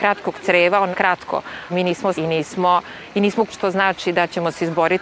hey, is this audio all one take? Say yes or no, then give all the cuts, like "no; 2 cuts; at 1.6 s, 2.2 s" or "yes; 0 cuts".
no; 4 cuts; at 0.9 s, 1.7 s, 2.1 s, 3.5 s